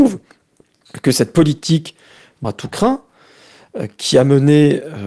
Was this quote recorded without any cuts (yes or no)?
no